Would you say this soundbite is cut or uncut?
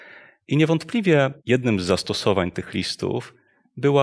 cut